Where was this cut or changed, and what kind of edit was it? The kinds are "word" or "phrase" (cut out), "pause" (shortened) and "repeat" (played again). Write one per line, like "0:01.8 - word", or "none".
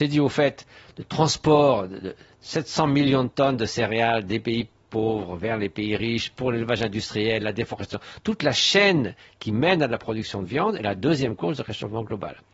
none